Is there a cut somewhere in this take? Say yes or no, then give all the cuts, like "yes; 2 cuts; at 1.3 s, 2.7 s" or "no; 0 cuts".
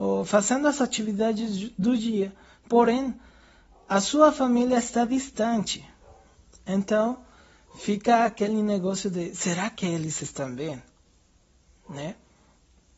no; 0 cuts